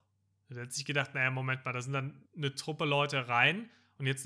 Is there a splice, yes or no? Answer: yes